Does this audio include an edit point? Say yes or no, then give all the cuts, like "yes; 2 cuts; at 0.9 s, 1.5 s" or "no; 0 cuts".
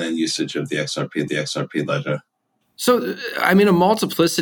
yes; 1 cut; at 1.3 s